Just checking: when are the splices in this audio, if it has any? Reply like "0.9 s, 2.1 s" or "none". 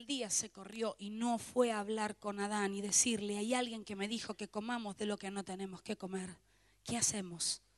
none